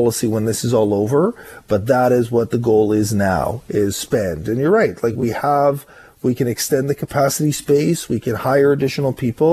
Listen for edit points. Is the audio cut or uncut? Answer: uncut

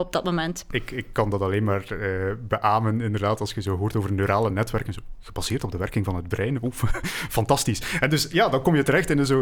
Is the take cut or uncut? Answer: uncut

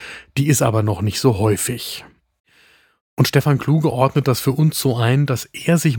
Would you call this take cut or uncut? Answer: uncut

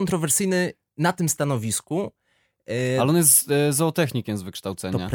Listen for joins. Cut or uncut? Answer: uncut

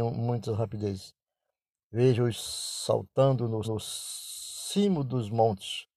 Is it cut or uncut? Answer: cut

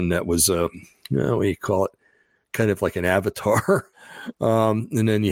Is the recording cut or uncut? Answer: cut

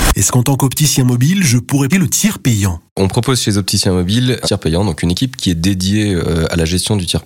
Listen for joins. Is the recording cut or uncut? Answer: cut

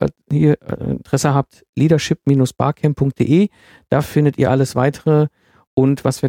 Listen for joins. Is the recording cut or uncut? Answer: uncut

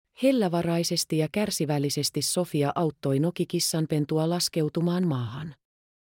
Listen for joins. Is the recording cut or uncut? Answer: uncut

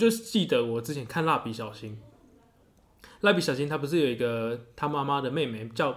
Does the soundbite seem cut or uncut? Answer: uncut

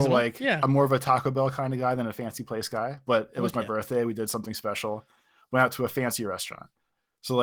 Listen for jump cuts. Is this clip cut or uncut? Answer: uncut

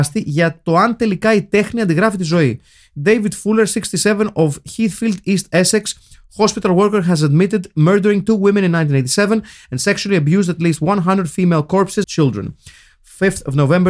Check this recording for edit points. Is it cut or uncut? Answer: cut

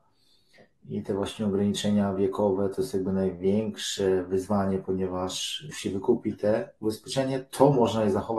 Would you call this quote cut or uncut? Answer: cut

